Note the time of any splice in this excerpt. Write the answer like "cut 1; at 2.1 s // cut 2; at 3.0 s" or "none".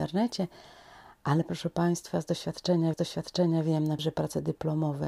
cut 1; at 2.9 s // cut 2; at 4.0 s